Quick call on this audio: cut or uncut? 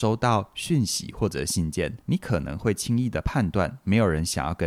cut